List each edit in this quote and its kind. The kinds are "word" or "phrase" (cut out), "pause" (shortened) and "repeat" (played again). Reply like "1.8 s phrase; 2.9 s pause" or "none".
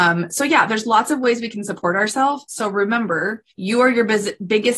3.5 s pause

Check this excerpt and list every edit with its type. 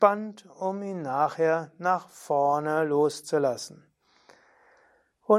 none

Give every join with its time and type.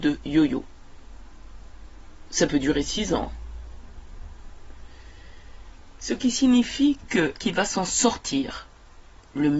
7.3 s word

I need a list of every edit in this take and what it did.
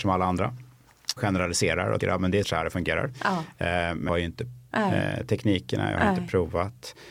1.2 s word; 2.0 s word; 2.4 s word; 4.1 s word; 4.7 s word

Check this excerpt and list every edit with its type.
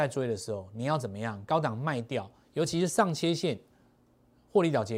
none

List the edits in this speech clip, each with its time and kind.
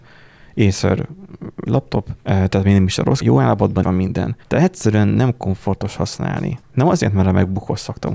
1.7 s word; 2.2 s pause; 3.2 s word; 3.8 s word; 4.4 s pause

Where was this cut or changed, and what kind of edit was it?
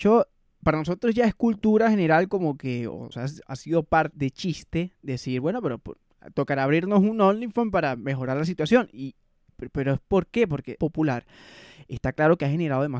3.1 s word; 4.1 s word; 10.8 s phrase

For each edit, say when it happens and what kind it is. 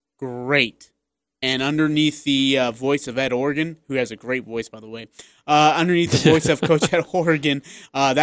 none

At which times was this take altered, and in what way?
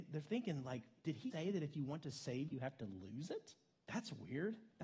1.3 s word; 2.5 s phrase; 3.7 s pause

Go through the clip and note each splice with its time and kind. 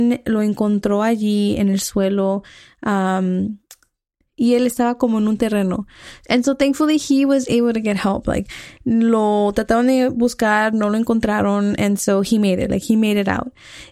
none

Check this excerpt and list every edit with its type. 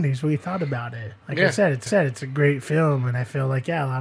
1.2 s pause; 1.9 s repeat

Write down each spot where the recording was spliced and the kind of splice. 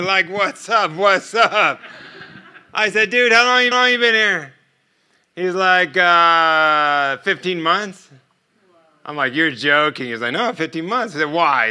3.7 s repeat

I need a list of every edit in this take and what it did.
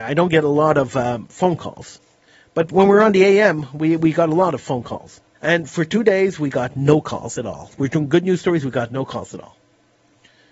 2.2 s pause; 5.4 s pause

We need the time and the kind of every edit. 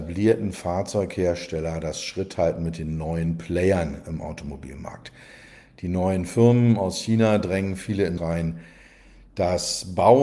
8.2 s word

